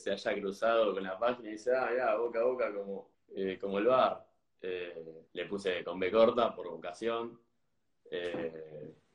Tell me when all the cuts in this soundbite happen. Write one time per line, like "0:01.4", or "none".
0:03.1
0:05.3